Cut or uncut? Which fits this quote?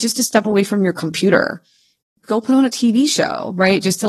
uncut